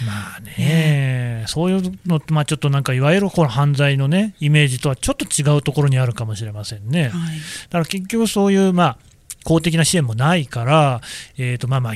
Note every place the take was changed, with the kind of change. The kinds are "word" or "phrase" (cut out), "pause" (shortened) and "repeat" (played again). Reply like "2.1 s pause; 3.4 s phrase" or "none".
none